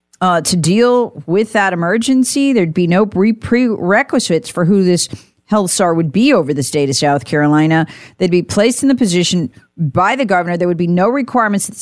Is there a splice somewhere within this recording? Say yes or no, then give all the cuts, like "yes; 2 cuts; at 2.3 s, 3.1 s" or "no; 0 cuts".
no; 0 cuts